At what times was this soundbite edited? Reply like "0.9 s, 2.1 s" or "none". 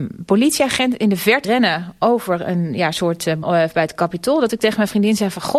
1.4 s, 3.4 s